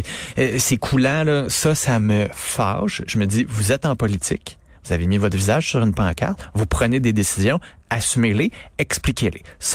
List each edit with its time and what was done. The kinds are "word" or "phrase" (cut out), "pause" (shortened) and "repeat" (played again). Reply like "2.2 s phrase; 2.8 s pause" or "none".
none